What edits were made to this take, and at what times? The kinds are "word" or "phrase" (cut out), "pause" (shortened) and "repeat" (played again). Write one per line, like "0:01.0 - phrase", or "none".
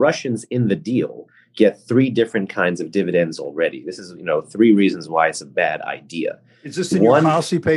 none